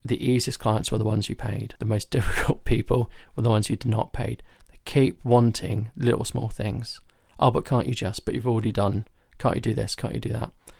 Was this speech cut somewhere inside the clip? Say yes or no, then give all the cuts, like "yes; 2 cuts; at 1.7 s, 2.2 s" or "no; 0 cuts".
no; 0 cuts